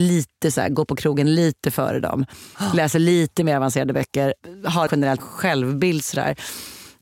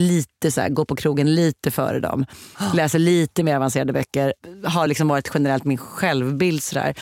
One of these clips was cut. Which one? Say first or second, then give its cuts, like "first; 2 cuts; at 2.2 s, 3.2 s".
first; 2 cuts; at 4.9 s, 5.2 s